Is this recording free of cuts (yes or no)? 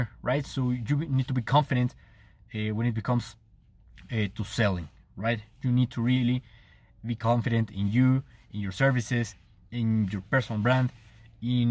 yes